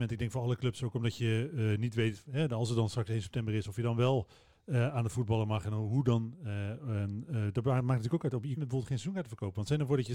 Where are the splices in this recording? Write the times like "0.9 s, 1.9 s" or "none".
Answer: 8.6 s